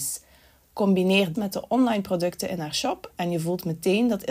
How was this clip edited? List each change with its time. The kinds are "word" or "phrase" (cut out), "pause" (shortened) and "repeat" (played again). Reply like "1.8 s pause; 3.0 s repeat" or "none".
1.3 s word